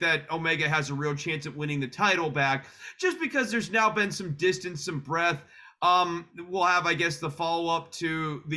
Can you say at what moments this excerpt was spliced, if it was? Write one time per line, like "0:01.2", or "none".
none